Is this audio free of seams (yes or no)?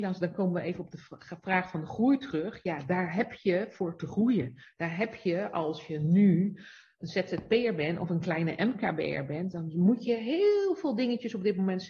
yes